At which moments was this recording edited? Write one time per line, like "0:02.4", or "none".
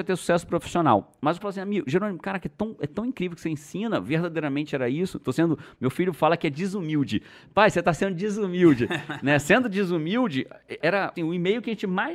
0:01.4
0:10.8
0:11.2